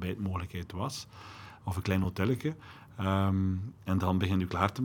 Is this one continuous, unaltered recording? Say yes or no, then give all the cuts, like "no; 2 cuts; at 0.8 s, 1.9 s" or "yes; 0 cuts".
yes; 0 cuts